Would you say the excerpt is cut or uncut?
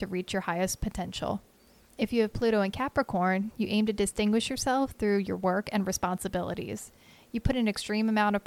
uncut